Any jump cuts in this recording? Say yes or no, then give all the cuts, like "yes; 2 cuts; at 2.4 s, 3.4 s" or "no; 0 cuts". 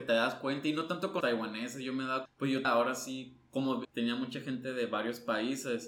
yes; 4 cuts; at 1.2 s, 2.3 s, 2.6 s, 3.8 s